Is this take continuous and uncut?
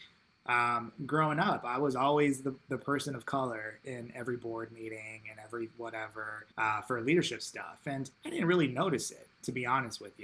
no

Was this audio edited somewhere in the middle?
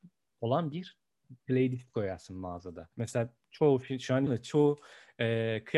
yes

